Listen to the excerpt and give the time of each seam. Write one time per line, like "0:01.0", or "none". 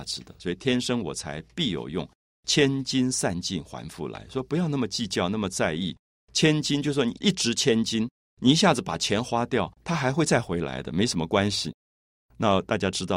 0:09.7